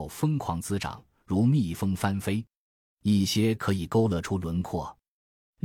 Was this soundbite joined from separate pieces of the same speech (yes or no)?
no